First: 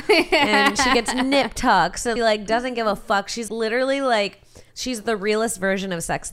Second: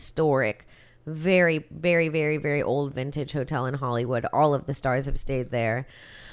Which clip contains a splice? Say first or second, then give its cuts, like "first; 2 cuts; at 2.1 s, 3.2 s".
first; 3 cuts; at 2.2 s, 3.5 s, 4.7 s